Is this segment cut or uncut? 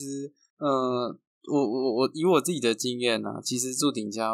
uncut